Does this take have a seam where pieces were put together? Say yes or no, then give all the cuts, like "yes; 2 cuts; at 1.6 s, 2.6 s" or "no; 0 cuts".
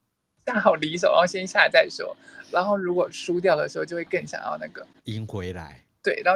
yes; 1 cut; at 4.9 s